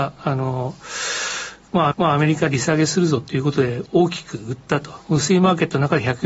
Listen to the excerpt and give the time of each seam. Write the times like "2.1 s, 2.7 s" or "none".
1.9 s